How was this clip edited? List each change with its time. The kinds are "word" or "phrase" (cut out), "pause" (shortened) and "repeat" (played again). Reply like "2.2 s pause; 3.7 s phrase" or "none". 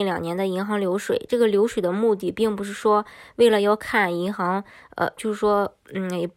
5.2 s word